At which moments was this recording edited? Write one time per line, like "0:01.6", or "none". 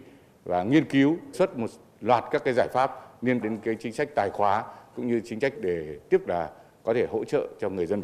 0:01.3
0:03.4
0:05.5
0:06.2